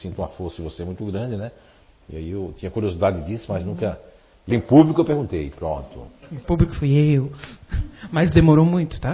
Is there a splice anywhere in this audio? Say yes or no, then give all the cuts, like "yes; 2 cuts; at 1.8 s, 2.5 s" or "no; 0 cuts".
yes; 2 cuts; at 4.5 s, 6.7 s